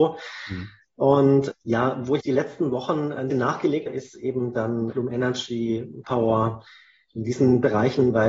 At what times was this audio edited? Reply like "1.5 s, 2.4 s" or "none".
1.5 s, 2.2 s, 3.3 s, 3.9 s, 4.9 s, 6.0 s